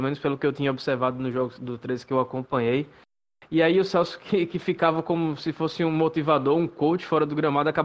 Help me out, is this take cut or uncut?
uncut